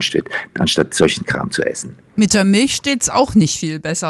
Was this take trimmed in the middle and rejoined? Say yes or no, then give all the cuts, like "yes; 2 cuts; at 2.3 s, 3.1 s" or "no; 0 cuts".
no; 0 cuts